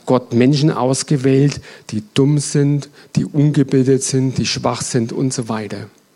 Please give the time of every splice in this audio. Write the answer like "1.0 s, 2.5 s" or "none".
none